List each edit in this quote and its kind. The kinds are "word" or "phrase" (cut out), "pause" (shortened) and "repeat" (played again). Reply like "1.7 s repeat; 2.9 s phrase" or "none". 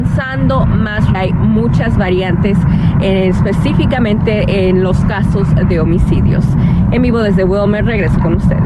1.1 s phrase

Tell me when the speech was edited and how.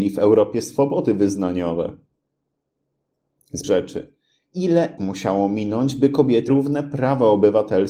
3.6 s phrase; 5.0 s word; 6.5 s word

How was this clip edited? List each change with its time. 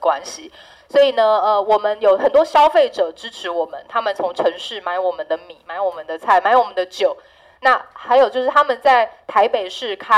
none

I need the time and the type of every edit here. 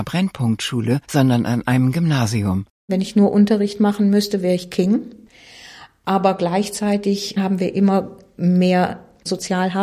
1.0 s pause

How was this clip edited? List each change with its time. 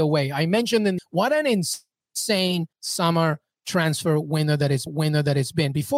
1.0 s phrase; 2.7 s pause; 4.9 s repeat

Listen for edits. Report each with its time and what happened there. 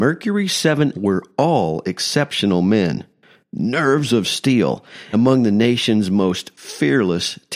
0.9 s word; 5.1 s word

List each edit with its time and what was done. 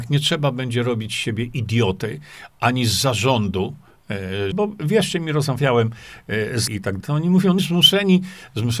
4.5 s word; 6.7 s word; 7.0 s word; 7.6 s word

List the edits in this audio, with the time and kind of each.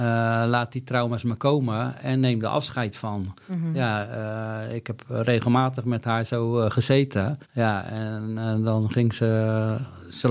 7.4 s pause

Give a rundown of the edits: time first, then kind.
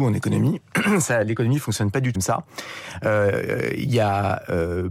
2.1 s word

